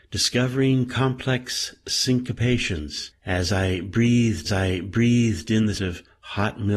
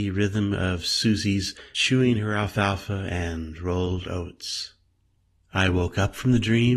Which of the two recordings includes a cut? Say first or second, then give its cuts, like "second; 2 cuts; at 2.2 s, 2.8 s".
first; 2 cuts; at 4.4 s, 5.7 s